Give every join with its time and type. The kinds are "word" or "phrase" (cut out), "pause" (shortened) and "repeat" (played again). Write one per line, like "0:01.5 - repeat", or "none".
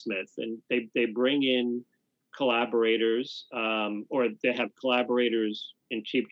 none